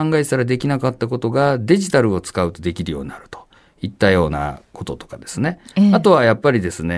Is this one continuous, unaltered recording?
yes; 0 cuts

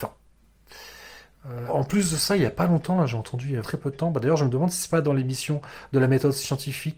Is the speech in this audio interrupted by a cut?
yes; 2 cuts; at 1.7 s, 3.6 s

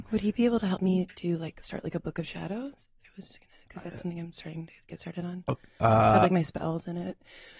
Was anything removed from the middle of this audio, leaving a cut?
yes; 1 cut; at 3.0 s

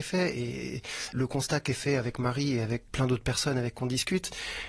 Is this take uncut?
no; 2 cuts; at 1.1 s, 2.9 s

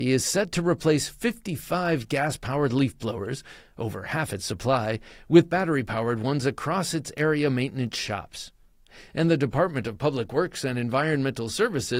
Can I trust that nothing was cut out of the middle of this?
yes; 0 cuts

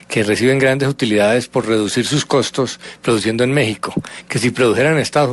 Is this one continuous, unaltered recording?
yes; 0 cuts

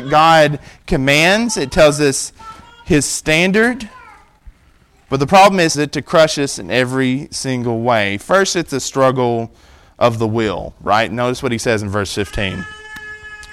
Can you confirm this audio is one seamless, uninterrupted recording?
no; 1 cut; at 5.7 s

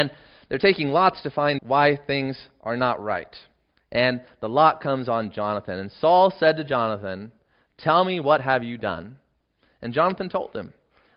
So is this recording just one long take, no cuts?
no; 1 cut; at 1.6 s

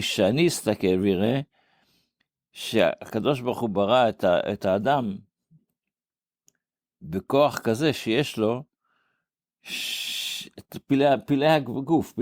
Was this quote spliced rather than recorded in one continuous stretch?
no; 0 cuts

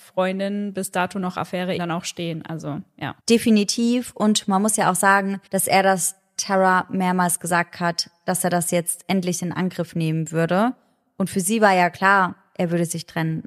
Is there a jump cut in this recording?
yes; 3 cuts; at 1.8 s, 3.2 s, 5.5 s

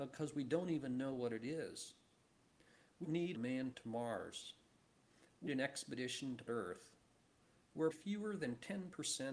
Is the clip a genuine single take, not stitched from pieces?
no; 6 cuts; at 3.0 s, 3.3 s, 3.7 s, 5.5 s, 6.5 s, 7.9 s

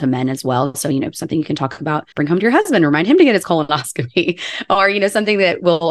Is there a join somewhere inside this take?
yes; 1 cut; at 2.1 s

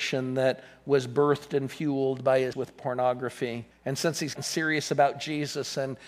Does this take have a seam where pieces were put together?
yes; 3 cuts; at 2.5 s, 3.7 s, 4.4 s

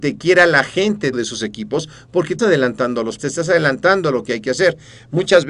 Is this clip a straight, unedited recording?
no; 3 cuts; at 1.1 s, 2.4 s, 3.2 s

